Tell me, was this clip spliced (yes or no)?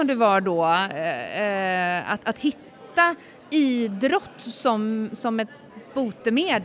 no